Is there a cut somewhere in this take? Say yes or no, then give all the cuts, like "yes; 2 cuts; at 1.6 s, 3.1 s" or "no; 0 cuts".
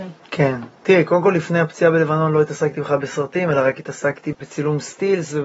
no; 0 cuts